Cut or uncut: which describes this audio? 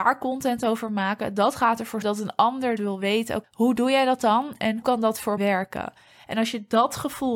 cut